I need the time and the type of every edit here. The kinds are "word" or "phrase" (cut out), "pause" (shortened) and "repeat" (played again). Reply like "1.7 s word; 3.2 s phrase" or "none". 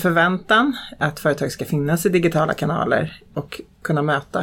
none